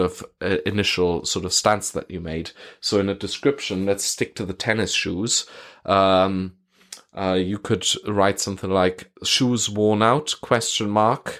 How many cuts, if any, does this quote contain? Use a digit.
1